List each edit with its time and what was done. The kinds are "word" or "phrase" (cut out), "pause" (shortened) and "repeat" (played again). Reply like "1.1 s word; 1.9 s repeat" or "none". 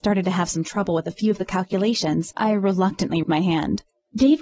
2.3 s word; 3.2 s word